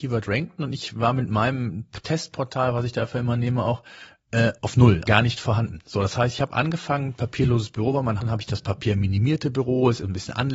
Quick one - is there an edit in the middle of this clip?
yes; 3 cuts; at 4.6 s, 5.1 s, 8.2 s

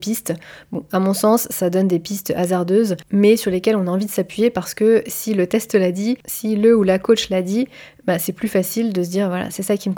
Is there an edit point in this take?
no; 0 cuts

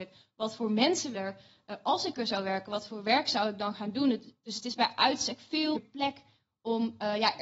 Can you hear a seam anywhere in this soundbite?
yes; 2 cuts; at 1.1 s, 5.7 s

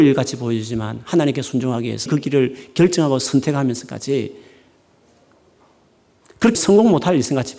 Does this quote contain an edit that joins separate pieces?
yes; 2 cuts; at 2.1 s, 6.5 s

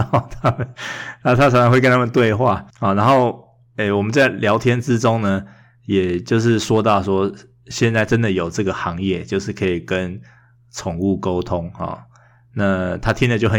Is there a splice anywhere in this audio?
yes; 1 cut; at 2.7 s

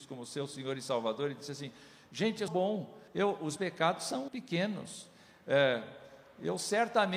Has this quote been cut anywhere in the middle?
yes; 4 cuts; at 2.5 s, 3.1 s, 3.6 s, 4.3 s

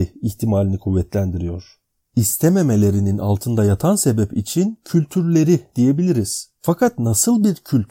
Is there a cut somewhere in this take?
no; 0 cuts

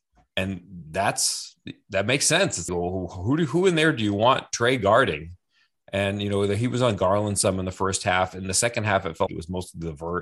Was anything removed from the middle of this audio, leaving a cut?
yes; 2 cuts; at 2.7 s, 9.3 s

